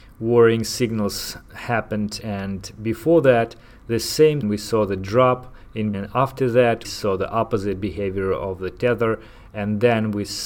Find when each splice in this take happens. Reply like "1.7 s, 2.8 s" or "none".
2.2 s, 4.4 s, 5.9 s, 6.8 s